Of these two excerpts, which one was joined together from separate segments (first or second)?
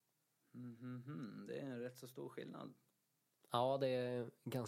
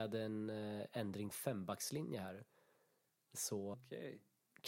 second